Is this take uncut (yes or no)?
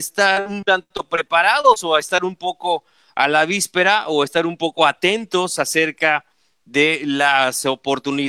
yes